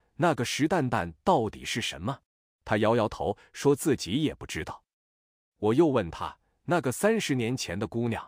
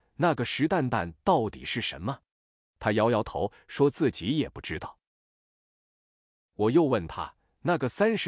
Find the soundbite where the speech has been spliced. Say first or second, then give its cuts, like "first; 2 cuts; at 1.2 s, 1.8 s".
first; 2 cuts; at 2.3 s, 5.0 s